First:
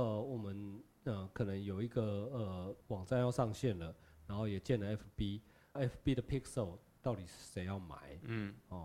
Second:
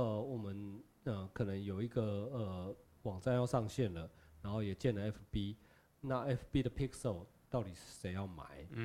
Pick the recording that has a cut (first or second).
first